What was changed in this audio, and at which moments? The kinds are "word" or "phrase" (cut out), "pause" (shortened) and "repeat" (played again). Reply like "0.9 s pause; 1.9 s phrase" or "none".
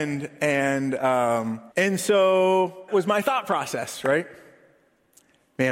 1.7 s pause; 2.9 s word

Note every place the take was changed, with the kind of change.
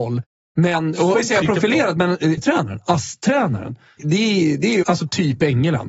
1.1 s phrase; 2.4 s word; 4.0 s word; 4.8 s phrase

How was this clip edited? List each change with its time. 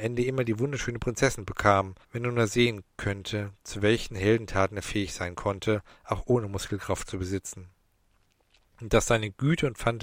2.0 s pause

